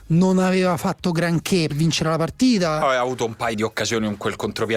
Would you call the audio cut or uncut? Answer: cut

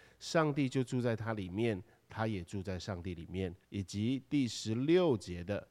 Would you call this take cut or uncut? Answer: cut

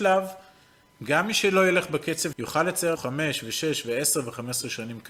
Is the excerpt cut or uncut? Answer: cut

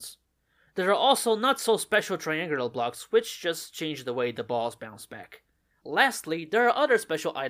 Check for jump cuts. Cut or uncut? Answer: cut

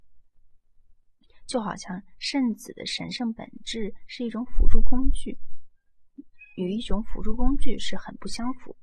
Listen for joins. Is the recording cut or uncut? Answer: uncut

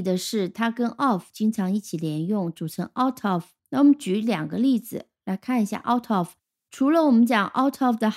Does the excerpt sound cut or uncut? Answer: cut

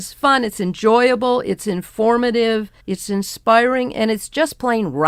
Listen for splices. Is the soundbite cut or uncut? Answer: cut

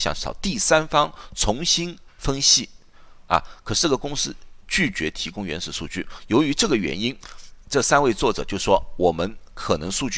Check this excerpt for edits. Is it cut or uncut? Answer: cut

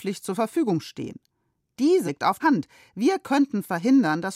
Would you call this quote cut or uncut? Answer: cut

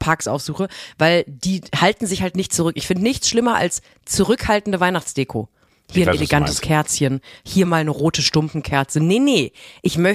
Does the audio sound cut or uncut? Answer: uncut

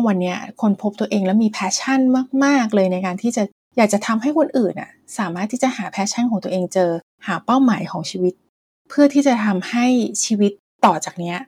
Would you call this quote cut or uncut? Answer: uncut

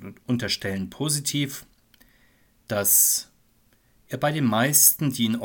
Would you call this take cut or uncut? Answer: uncut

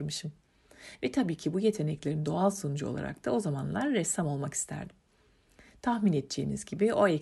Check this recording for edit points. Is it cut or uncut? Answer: uncut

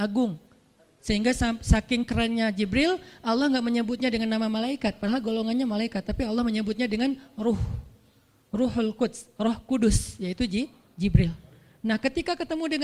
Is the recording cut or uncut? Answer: uncut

